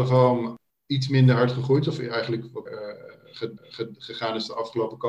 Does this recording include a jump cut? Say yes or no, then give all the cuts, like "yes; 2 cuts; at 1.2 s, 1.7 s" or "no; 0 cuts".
yes; 2 cuts; at 2.7 s, 3.6 s